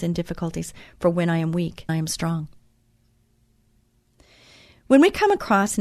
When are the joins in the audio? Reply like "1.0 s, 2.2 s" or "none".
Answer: 1.9 s